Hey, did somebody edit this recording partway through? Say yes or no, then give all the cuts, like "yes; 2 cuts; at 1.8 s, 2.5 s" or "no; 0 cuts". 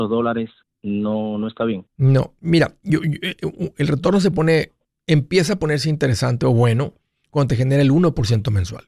no; 0 cuts